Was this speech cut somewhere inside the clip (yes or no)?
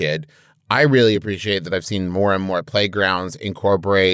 no